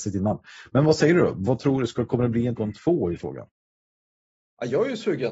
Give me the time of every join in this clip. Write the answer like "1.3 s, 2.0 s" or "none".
2.6 s, 3.2 s